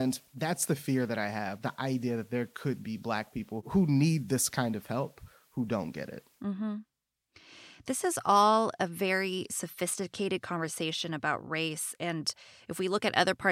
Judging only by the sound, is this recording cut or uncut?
uncut